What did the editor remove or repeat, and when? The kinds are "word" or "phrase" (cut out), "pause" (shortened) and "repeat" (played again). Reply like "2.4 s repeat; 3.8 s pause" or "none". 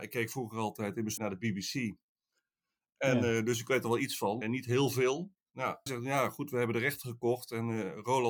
1.2 s word; 4.4 s word; 5.9 s word